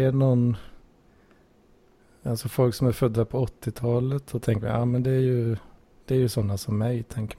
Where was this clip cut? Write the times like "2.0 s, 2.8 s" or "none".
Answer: none